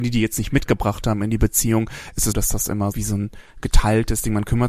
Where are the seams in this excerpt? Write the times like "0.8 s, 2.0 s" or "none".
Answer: 2.3 s, 2.9 s